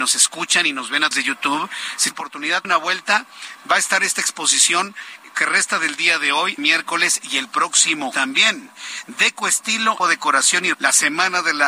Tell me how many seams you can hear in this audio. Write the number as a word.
eight